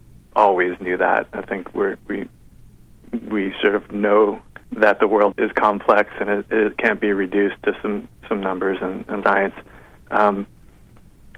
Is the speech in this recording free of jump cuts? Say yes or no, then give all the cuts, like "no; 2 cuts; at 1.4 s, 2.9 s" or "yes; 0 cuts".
no; 3 cuts; at 4.6 s, 5.3 s, 9.2 s